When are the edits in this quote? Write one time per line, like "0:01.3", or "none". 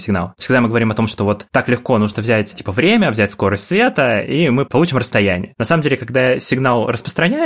0:02.1